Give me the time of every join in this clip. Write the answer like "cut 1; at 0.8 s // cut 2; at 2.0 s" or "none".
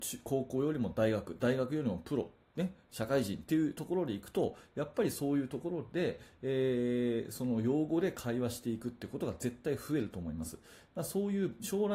none

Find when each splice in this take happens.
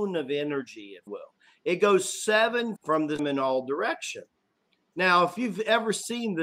cut 1; at 1.1 s // cut 2; at 2.8 s // cut 3; at 3.2 s

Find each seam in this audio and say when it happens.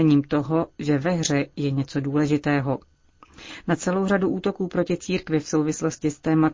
none

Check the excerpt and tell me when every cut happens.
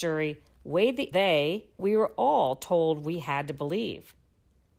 cut 1; at 1.1 s // cut 2; at 1.8 s

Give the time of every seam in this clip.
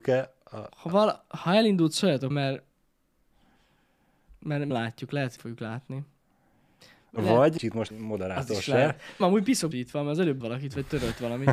cut 1; at 2.3 s // cut 2; at 4.7 s // cut 3; at 5.4 s // cut 4; at 7.6 s // cut 5; at 7.9 s // cut 6; at 9.2 s // cut 7; at 9.7 s // cut 8; at 10.4 s

